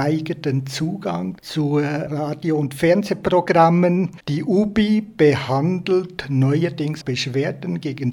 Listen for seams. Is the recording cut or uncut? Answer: cut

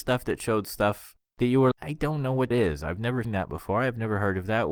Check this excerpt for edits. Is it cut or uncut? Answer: cut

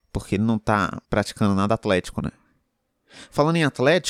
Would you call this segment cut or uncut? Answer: cut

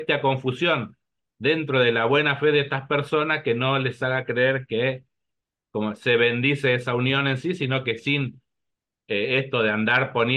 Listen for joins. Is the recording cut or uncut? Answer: uncut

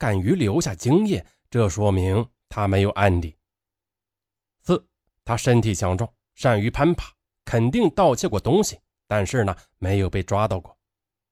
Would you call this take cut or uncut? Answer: uncut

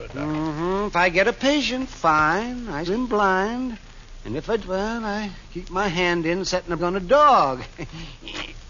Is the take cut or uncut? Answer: cut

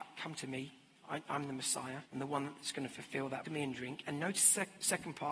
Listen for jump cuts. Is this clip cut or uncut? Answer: cut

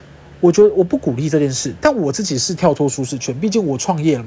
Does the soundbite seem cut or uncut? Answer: uncut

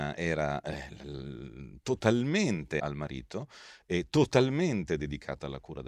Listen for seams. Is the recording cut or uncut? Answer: cut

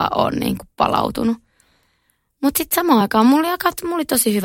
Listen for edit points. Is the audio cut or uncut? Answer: uncut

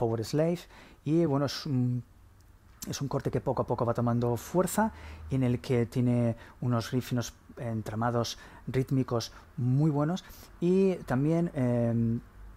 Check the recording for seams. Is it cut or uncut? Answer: uncut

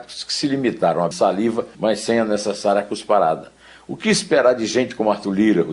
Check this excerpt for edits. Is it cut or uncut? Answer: cut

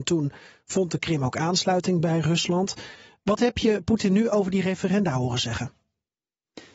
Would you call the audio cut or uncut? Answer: uncut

